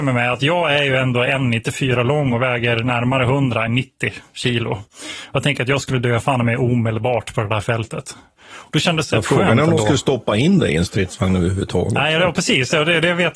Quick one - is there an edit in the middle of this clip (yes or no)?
no